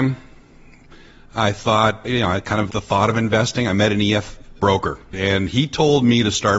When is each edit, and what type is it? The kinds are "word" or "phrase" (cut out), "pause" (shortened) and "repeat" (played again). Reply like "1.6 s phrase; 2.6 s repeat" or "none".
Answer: 2.7 s word; 4.6 s word